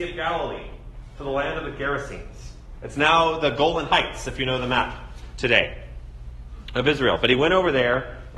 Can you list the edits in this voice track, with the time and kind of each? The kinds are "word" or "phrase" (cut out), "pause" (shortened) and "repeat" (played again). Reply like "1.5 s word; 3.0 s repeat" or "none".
none